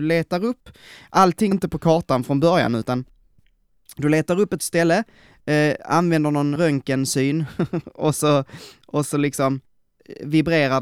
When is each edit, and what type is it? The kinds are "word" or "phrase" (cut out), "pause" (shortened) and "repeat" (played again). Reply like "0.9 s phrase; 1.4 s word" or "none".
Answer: 1.5 s word; 4.6 s word; 6.6 s word